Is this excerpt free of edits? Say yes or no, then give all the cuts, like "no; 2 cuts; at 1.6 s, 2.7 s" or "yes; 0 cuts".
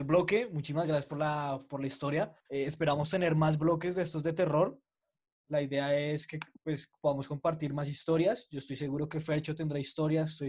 no; 1 cut; at 2.4 s